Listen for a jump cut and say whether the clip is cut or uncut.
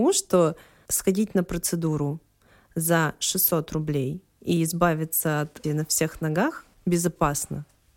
cut